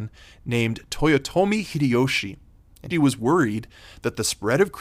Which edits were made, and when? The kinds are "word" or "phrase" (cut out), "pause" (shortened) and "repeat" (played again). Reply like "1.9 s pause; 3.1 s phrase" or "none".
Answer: 2.9 s word